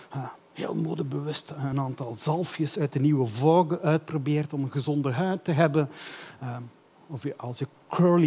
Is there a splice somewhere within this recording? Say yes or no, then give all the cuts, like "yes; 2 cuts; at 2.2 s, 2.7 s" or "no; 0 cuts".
no; 0 cuts